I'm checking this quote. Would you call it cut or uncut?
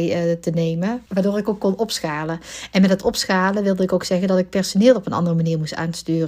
cut